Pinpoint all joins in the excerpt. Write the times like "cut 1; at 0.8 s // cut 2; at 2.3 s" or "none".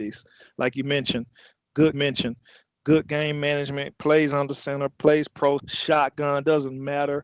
cut 1; at 1.9 s // cut 2; at 5.6 s